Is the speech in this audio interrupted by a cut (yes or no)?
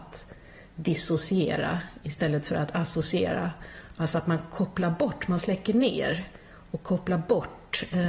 no